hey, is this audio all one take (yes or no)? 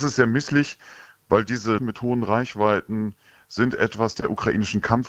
no